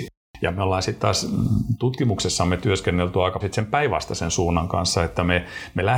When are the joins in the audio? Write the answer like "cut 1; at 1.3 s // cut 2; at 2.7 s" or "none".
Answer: cut 1; at 3.4 s